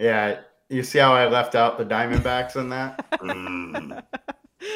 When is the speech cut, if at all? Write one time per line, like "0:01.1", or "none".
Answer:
none